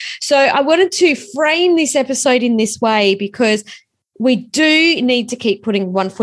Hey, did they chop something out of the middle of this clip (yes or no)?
no